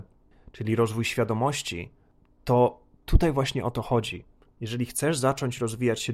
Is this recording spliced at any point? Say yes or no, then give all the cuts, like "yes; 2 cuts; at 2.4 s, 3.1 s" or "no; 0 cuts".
no; 0 cuts